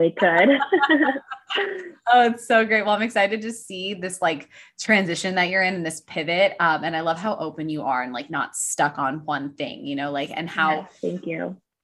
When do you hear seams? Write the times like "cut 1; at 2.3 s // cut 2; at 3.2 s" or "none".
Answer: none